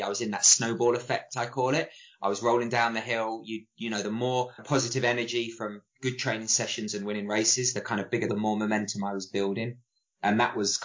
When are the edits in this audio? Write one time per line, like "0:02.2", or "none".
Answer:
0:04.6
0:08.3